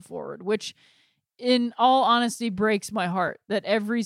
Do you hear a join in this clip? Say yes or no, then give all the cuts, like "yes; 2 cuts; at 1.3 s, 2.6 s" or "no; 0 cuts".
no; 0 cuts